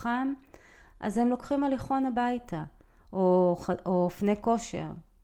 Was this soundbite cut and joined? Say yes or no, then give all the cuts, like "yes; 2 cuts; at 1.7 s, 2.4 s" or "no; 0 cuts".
no; 0 cuts